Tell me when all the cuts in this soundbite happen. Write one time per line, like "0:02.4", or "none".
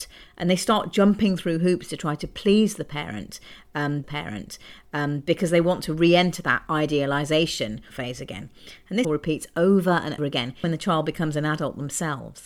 0:04.0
0:07.9
0:09.0
0:10.2
0:10.6